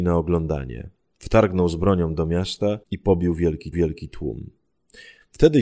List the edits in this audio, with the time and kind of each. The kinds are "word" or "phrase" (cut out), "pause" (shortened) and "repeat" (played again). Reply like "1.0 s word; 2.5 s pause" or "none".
2.8 s pause; 3.7 s repeat